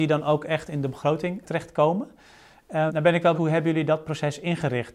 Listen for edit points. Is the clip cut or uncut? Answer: cut